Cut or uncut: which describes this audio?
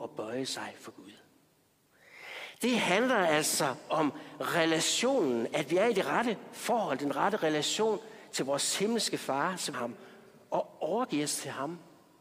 cut